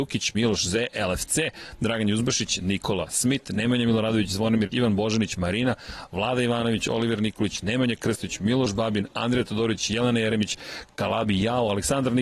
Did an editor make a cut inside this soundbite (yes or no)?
yes